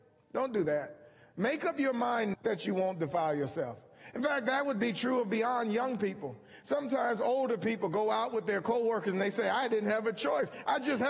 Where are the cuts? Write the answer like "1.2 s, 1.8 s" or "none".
2.3 s